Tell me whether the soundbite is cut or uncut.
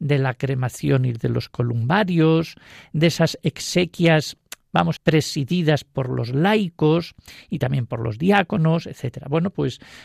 cut